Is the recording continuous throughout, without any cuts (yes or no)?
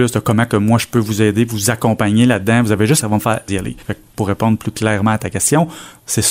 no